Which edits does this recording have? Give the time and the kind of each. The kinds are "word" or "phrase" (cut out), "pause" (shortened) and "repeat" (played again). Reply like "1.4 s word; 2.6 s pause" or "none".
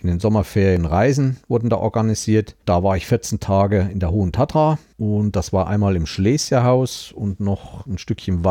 2.6 s pause; 4.9 s pause